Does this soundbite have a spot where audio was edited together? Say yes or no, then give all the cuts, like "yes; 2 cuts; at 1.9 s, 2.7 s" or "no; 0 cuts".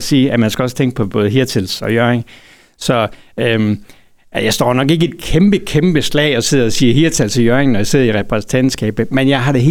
no; 0 cuts